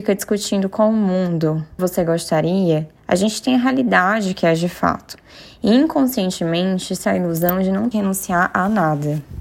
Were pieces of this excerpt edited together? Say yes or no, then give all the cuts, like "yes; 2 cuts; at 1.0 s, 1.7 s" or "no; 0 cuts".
yes; 4 cuts; at 1.8 s, 3.0 s, 7.0 s, 7.9 s